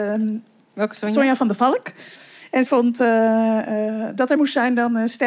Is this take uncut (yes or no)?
no